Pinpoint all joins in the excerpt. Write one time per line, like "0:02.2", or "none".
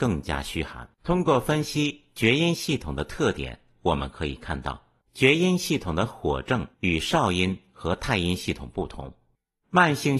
0:00.9
0:05.0
0:06.7